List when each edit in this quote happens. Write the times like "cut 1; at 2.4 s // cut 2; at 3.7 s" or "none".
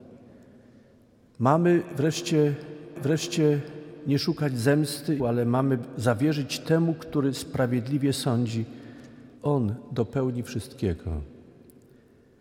cut 1; at 3.0 s // cut 2; at 5.2 s // cut 3; at 9.4 s